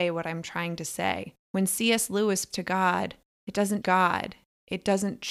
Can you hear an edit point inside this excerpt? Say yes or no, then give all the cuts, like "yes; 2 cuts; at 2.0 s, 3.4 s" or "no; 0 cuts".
yes; 4 cuts; at 1.4 s, 2.5 s, 3.3 s, 3.8 s